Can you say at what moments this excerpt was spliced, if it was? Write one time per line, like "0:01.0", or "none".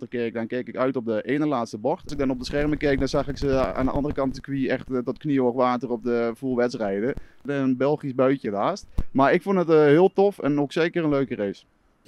0:04.3
0:08.4